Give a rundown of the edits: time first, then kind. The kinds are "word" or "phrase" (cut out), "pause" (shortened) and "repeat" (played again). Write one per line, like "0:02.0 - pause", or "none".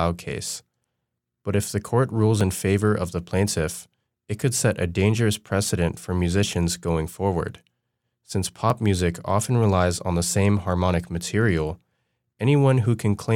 none